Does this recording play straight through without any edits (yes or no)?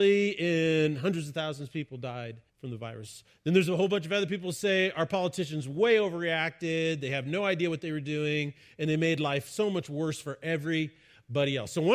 no